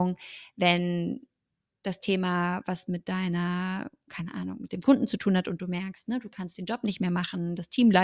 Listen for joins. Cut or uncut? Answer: uncut